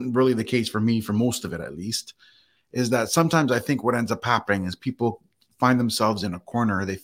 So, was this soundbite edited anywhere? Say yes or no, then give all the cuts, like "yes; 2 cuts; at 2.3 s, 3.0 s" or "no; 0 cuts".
no; 0 cuts